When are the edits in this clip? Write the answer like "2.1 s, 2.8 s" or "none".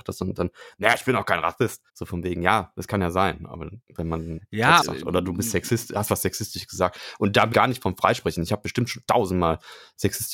1.9 s, 3.8 s, 4.8 s, 7.5 s